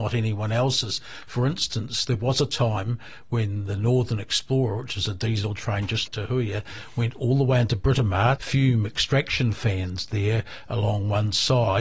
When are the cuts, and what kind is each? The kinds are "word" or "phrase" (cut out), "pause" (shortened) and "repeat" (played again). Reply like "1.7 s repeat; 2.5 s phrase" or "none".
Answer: 6.1 s word; 8.4 s phrase